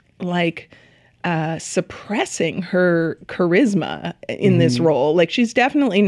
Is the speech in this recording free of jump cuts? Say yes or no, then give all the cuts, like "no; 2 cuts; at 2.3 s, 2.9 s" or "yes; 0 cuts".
yes; 0 cuts